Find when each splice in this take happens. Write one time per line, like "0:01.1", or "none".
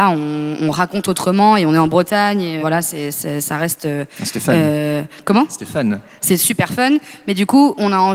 0:02.6